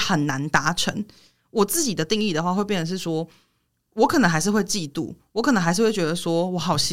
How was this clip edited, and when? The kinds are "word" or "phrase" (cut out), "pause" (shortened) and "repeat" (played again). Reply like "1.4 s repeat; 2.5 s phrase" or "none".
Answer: none